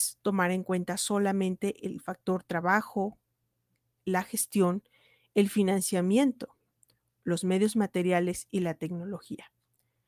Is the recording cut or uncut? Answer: uncut